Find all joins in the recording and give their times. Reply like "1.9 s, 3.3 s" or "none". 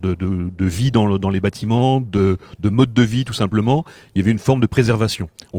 none